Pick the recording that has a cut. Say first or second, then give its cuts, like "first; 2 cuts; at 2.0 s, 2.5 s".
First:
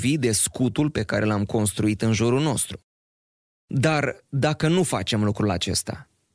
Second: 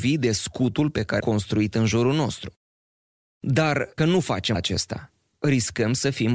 second; 3 cuts; at 1.2 s, 4.0 s, 4.5 s